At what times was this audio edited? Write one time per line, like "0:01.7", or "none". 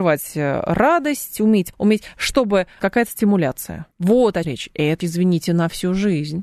0:01.7
0:02.8
0:03.9
0:04.4
0:05.0